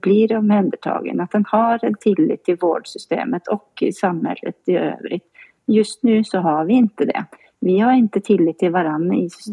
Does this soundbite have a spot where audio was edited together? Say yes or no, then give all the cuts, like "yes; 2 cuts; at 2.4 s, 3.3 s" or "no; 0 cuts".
no; 0 cuts